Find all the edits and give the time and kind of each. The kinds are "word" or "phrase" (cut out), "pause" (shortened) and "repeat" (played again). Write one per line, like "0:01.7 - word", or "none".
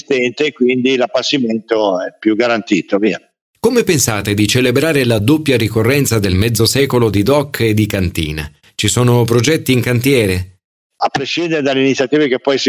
none